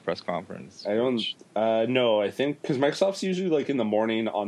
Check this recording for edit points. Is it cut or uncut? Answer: uncut